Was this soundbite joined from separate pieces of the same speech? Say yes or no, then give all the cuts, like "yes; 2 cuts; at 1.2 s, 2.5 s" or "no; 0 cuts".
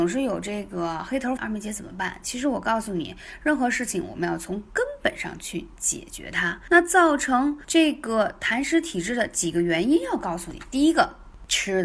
yes; 1 cut; at 1.4 s